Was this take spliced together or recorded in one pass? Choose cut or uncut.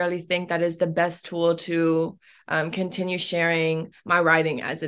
uncut